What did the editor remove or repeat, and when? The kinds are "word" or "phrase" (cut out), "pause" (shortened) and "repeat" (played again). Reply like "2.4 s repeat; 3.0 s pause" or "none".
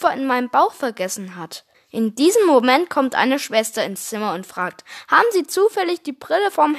1.7 s pause

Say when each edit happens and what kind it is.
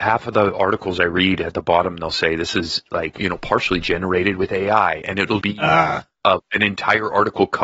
3.2 s word; 5.4 s word

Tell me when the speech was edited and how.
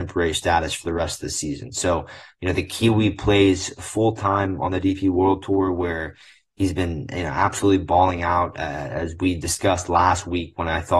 none

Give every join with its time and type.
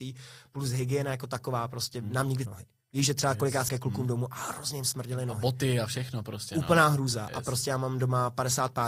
2.5 s phrase; 3.7 s word

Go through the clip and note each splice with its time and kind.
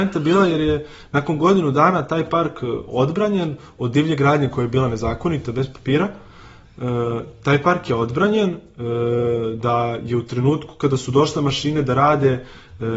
none

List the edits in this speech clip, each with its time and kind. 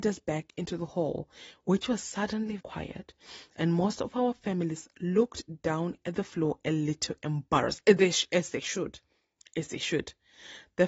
2.6 s word

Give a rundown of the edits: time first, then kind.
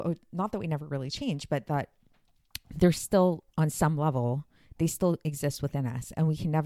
none

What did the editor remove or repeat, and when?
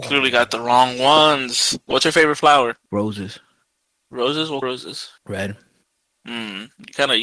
2.8 s pause; 4.6 s word; 5.2 s pause

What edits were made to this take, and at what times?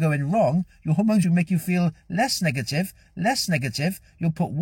1.2 s phrase; 3.1 s repeat

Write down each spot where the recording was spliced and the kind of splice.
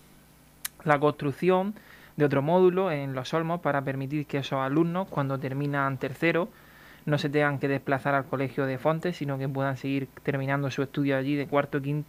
none

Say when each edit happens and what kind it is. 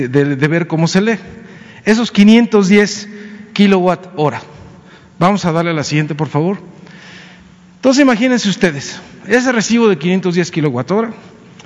none

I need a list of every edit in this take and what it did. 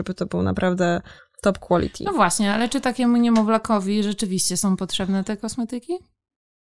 1.2 s pause

